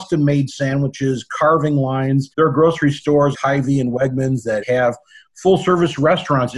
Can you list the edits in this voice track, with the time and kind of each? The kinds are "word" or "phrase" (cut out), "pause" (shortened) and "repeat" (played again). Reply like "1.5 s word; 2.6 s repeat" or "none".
2.3 s pause; 3.3 s word; 4.6 s word